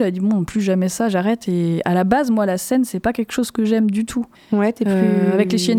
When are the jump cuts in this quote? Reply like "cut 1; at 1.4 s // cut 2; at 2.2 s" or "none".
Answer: cut 1; at 4.3 s